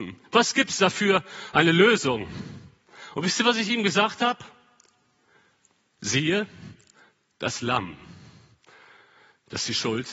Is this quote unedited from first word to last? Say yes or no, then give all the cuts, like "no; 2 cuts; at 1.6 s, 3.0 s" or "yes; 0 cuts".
yes; 0 cuts